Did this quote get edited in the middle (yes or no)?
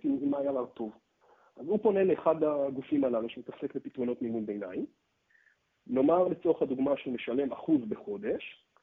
no